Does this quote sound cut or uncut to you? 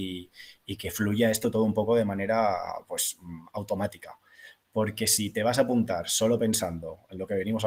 uncut